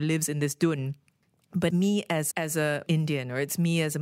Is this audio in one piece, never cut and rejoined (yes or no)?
no